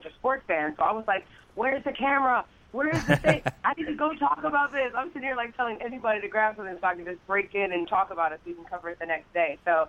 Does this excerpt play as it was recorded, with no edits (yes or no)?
no